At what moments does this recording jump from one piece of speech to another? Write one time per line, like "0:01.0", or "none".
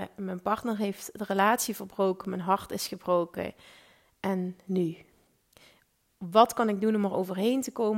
none